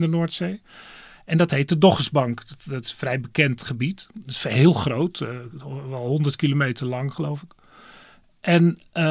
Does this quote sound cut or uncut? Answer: uncut